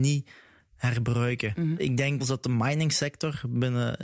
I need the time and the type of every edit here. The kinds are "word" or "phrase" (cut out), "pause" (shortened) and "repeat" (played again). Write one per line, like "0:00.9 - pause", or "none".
0:02.2 - word